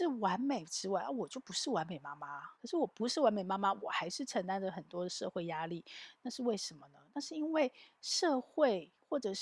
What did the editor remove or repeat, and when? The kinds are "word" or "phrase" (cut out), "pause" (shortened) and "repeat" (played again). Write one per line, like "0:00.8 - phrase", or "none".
0:02.5 - pause